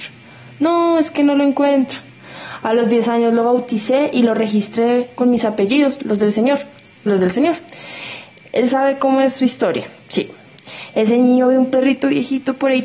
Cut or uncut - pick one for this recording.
cut